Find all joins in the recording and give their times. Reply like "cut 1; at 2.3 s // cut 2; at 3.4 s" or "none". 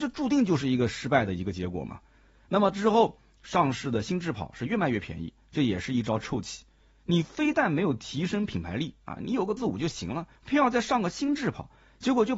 cut 1; at 9.6 s // cut 2; at 10.4 s